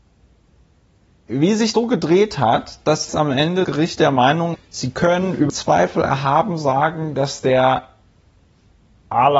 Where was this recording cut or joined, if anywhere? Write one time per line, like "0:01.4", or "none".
0:01.7
0:03.1
0:03.6
0:04.5
0:05.5